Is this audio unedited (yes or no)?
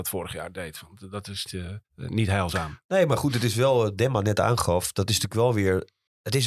no